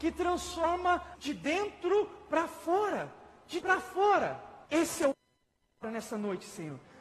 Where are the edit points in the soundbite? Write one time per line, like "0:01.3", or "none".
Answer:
0:01.1
0:03.6
0:04.7
0:05.1